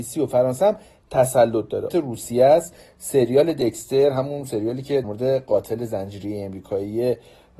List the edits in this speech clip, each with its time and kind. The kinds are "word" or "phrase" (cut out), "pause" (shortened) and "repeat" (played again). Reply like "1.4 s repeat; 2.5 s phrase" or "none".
1.9 s phrase; 5.0 s word

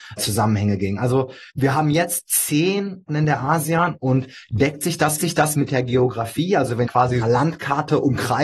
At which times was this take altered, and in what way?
1.5 s pause; 3.1 s word; 5.2 s repeat; 6.9 s word; 7.2 s phrase

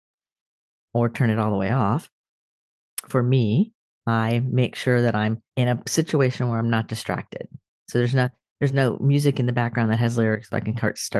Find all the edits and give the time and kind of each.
5.5 s pause

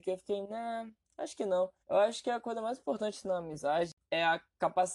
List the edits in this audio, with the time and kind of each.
1.8 s pause

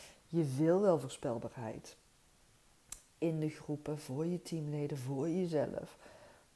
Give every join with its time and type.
none

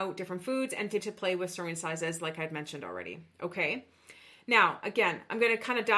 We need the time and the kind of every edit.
1.0 s word

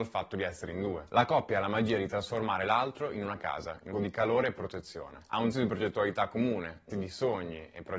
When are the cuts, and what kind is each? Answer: 3.9 s word; 5.5 s word; 6.9 s word

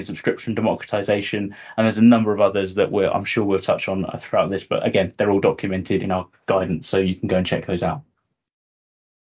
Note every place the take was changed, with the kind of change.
6.0 s word

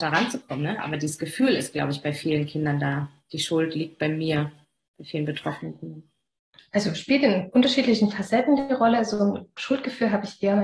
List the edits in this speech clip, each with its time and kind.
none

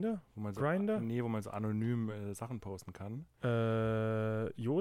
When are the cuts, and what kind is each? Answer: none

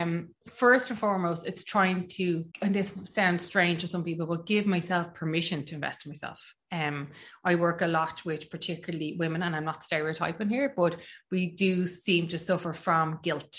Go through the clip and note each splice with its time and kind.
2.5 s pause

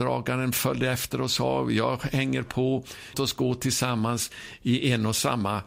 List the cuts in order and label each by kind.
3.1 s word

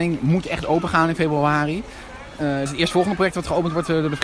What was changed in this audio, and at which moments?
2.7 s word

